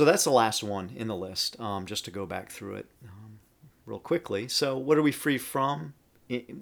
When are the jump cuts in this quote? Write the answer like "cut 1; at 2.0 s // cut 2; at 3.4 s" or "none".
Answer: cut 1; at 2.9 s